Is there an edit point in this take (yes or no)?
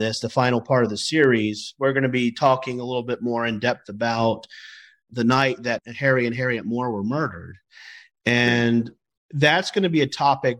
no